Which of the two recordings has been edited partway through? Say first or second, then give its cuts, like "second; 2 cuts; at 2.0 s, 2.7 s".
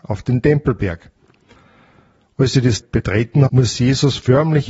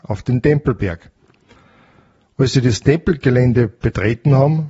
first; 2 cuts; at 2.8 s, 3.5 s